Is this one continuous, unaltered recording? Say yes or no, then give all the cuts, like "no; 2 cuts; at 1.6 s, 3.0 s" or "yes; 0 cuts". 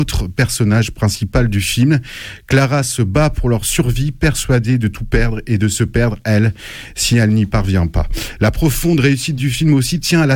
yes; 0 cuts